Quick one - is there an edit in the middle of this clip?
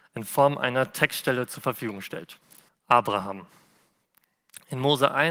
yes; 1 cut; at 2.7 s

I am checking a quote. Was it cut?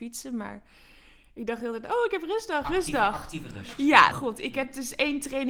yes; 1 cut; at 4.1 s

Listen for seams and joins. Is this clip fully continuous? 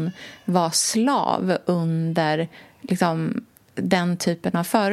yes; 0 cuts

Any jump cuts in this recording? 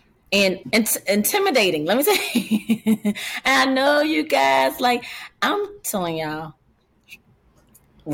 no; 0 cuts

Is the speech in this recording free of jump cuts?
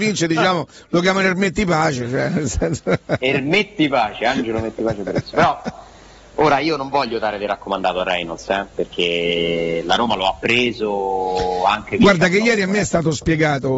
yes; 0 cuts

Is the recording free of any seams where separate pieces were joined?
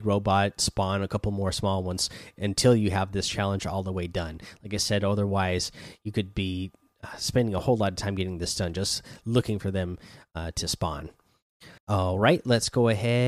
no; 1 cut; at 11.8 s

